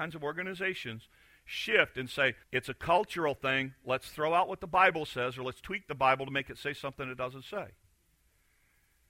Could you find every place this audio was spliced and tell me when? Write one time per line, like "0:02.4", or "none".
0:02.4